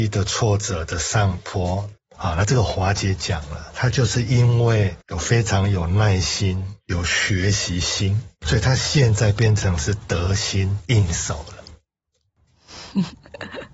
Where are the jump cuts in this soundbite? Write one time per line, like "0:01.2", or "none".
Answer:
0:02.0
0:05.0
0:08.4